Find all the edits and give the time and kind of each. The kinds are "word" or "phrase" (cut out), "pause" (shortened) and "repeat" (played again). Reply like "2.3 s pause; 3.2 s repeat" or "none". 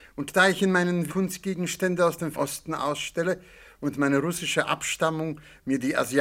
1.1 s word; 2.3 s word